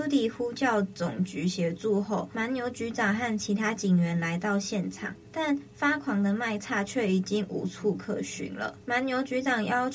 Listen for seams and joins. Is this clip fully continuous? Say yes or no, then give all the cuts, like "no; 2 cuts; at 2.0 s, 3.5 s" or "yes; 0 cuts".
yes; 0 cuts